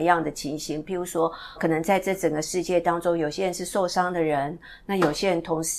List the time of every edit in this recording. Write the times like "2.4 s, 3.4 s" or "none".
1.6 s